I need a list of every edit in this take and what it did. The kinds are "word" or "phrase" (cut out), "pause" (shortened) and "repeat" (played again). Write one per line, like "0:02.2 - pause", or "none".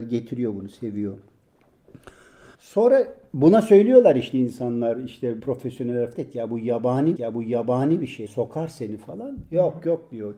0:02.5 - pause
0:04.3 - word
0:05.4 - word
0:06.1 - word
0:07.2 - repeat
0:08.3 - word